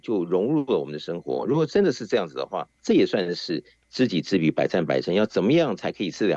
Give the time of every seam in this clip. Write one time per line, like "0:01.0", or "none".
0:02.8